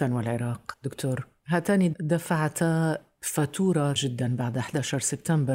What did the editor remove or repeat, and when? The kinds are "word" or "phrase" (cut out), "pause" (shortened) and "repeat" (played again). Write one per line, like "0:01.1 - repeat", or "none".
0:01.9 - word
0:04.0 - word